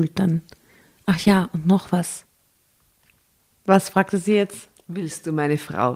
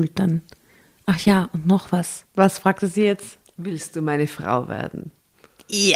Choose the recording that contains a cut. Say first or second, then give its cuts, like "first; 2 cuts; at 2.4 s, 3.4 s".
second; 1 cut; at 2.3 s